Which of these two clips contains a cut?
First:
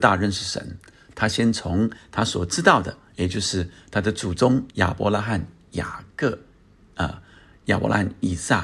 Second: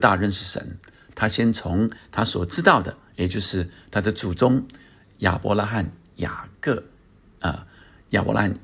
first; 1 cut; at 4.7 s

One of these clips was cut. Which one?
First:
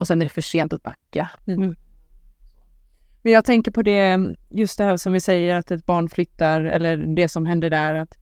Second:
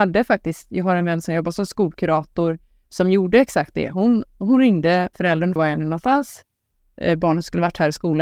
second; 2 cuts; at 5.1 s, 5.6 s

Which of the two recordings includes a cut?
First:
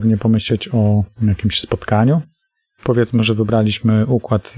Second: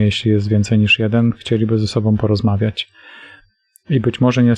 first; 1 cut; at 1.1 s

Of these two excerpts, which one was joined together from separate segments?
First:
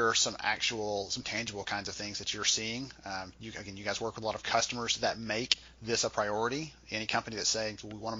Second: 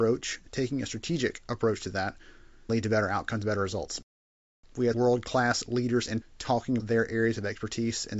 second; 4 cuts; at 2.7 s, 4.9 s, 6.2 s, 6.8 s

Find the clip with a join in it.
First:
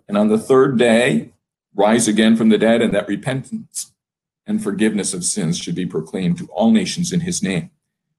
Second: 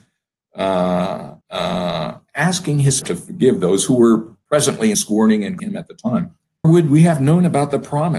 second; 5 cuts; at 1.4 s, 3.0 s, 4.9 s, 5.6 s, 6.6 s

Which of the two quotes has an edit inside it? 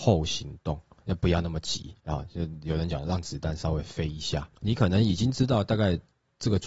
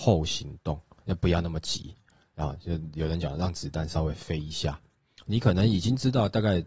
first; 2 cuts; at 2.0 s, 4.6 s

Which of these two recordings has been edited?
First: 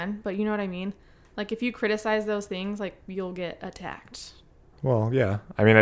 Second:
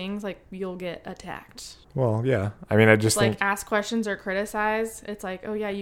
second; 1 cut; at 1.8 s

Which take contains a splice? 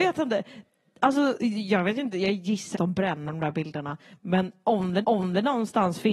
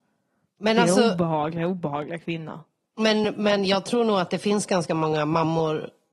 first; 3 cuts; at 2.7 s, 3.3 s, 5.0 s

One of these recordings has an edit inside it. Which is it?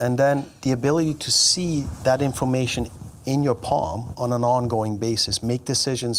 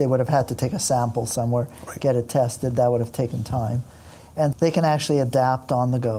second; 1 cut; at 4.5 s

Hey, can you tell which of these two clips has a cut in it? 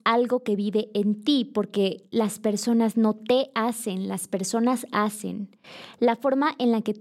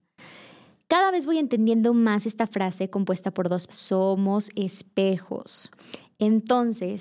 second; 1 cut; at 3.7 s

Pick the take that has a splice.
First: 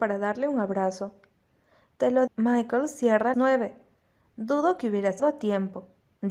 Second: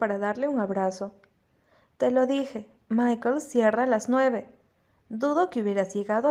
first; 3 cuts; at 2.3 s, 3.3 s, 5.2 s

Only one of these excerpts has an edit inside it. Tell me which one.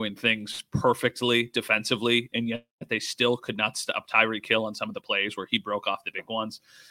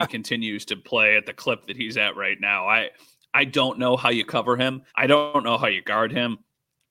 second; 1 cut; at 4.9 s

